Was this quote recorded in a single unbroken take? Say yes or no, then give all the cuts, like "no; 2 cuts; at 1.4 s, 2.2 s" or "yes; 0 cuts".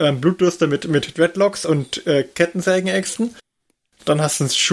yes; 0 cuts